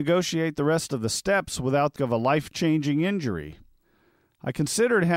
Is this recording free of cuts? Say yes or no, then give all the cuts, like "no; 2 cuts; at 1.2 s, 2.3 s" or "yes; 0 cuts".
no; 1 cut; at 2.0 s